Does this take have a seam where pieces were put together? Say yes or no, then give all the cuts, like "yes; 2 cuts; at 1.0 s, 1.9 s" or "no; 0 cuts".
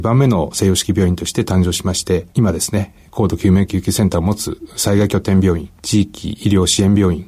yes; 2 cuts; at 2.3 s, 5.8 s